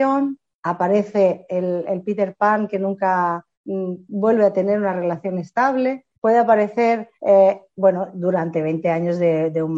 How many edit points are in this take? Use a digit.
3